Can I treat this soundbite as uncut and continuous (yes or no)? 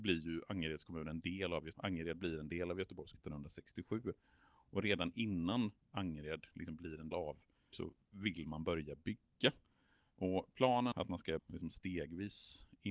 no